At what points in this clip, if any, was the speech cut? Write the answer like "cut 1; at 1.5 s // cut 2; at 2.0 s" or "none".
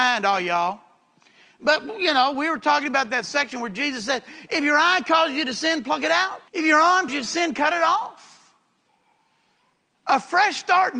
cut 1; at 6.5 s // cut 2; at 7.1 s